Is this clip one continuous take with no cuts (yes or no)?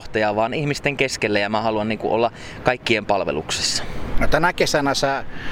yes